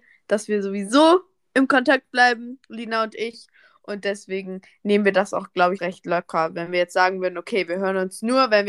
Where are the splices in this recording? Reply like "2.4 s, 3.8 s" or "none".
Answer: 2.6 s, 5.8 s